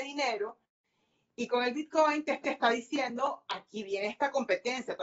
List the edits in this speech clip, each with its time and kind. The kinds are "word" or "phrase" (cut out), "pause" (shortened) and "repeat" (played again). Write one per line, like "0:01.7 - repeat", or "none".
0:02.4 - repeat